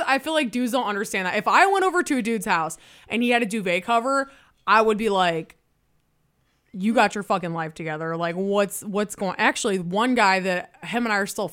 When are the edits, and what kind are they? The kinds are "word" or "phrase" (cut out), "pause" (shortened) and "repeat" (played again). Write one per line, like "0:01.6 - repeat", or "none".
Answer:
none